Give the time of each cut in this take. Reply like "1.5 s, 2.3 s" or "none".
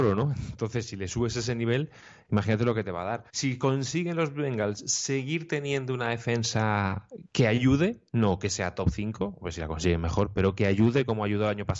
3.3 s, 7.3 s